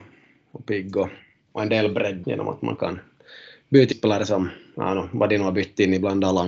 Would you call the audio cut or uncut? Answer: cut